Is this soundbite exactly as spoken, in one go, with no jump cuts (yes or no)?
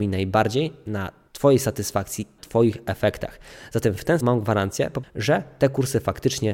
no